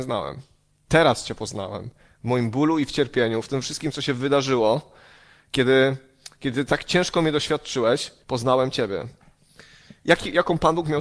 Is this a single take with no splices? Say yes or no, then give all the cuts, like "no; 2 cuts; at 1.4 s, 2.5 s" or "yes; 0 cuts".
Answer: no; 2 cuts; at 8.2 s, 10.0 s